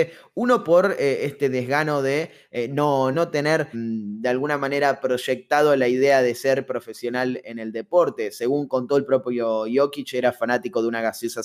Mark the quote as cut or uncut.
cut